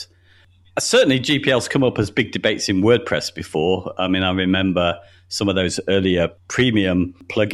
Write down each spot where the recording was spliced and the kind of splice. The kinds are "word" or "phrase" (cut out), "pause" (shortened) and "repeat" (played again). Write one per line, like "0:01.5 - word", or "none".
none